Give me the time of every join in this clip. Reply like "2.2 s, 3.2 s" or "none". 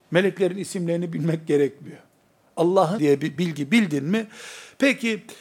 3.0 s